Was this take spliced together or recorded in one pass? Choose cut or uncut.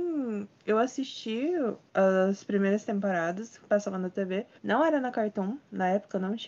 cut